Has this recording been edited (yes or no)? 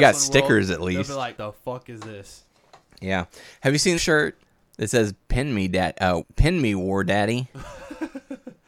yes